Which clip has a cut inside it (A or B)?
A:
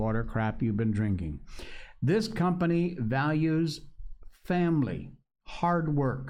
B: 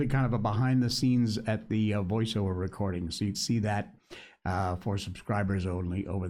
B